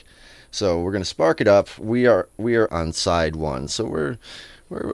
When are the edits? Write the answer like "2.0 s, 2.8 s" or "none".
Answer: 2.7 s